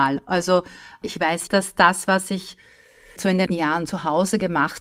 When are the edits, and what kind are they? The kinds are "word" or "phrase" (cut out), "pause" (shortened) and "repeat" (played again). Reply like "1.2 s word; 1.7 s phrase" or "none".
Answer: 1.0 s word; 1.5 s word; 3.2 s word; 3.5 s word

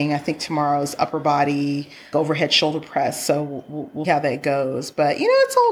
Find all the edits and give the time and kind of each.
2.1 s word; 4.0 s word

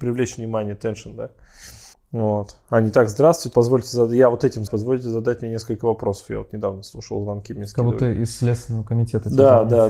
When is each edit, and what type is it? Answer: 1.9 s pause; 3.5 s word; 4.7 s word

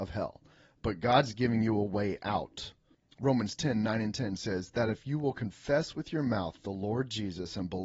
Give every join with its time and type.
none

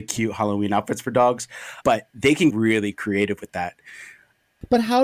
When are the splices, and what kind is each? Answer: 1.8 s word; 2.5 s word

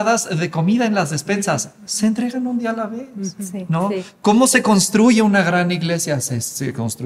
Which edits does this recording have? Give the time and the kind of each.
none

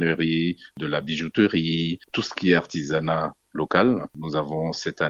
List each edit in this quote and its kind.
none

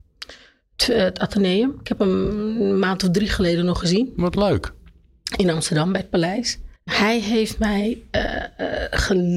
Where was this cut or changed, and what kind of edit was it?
6.8 s pause

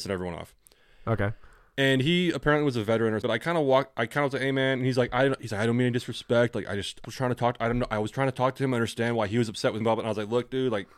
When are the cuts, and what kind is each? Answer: 3.2 s word; 7.0 s word; 9.8 s word

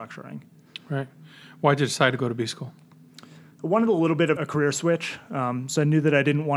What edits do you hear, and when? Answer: 4.4 s word

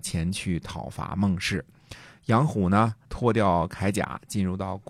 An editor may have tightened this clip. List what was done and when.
3.0 s word

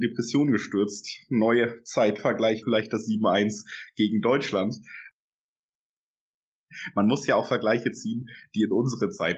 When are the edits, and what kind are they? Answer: 2.6 s word

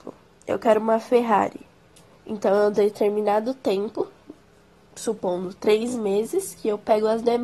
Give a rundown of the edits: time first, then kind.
none

